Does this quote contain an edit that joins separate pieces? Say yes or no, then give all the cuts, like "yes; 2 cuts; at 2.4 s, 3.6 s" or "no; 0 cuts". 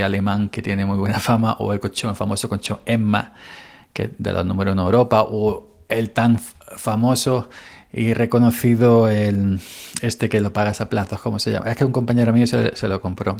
no; 0 cuts